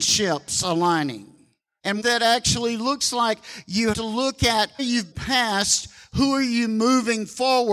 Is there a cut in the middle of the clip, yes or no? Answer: yes